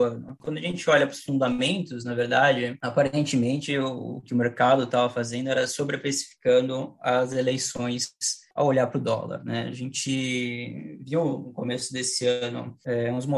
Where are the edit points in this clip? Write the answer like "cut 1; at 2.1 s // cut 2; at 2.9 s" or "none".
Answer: none